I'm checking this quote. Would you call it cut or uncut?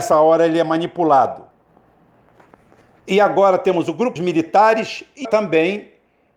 cut